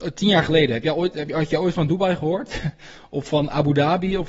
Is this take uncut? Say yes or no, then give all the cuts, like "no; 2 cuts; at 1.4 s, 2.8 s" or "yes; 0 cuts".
yes; 0 cuts